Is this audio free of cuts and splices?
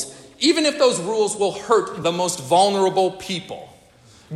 yes; 0 cuts

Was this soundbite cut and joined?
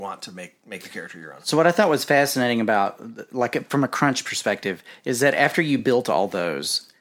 no; 0 cuts

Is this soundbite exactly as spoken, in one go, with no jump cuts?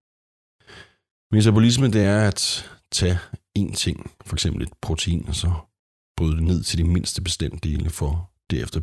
yes; 0 cuts

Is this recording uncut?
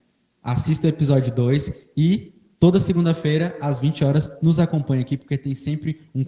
yes; 0 cuts

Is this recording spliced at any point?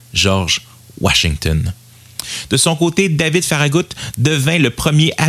no; 0 cuts

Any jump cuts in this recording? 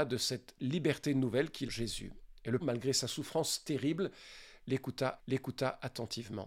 yes; 3 cuts; at 1.7 s, 2.6 s, 5.2 s

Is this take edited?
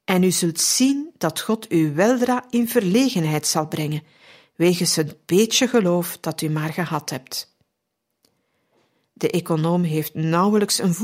no; 0 cuts

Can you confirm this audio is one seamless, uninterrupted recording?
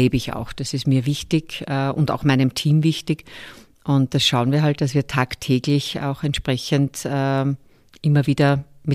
yes; 0 cuts

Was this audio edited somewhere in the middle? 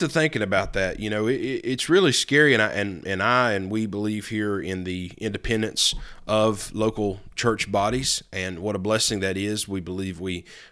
no; 0 cuts

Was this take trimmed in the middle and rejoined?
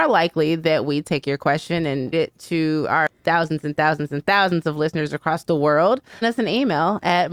yes; 2 cuts; at 2.1 s, 6.2 s

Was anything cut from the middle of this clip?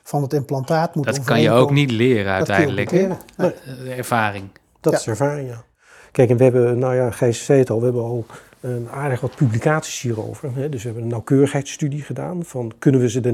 no; 0 cuts

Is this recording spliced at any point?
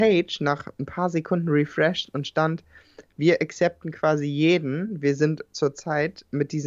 no; 0 cuts

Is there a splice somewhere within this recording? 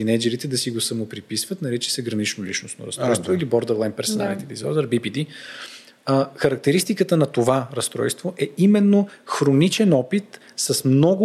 no; 0 cuts

